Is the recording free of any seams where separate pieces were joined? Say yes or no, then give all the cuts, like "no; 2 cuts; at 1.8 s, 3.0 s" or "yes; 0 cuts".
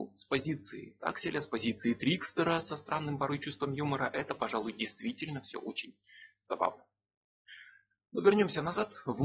yes; 0 cuts